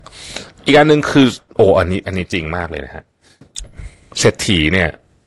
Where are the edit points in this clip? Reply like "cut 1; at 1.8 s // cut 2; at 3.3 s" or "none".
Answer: none